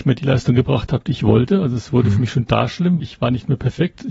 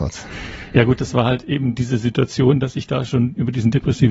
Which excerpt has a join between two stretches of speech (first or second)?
first